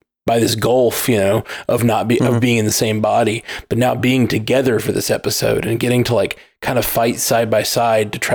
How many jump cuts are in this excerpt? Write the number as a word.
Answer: zero